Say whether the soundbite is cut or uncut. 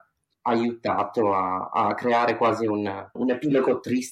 cut